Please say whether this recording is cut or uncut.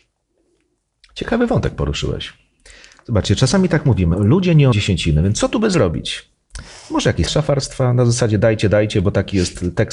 cut